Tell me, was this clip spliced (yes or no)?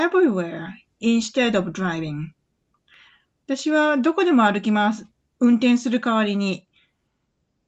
no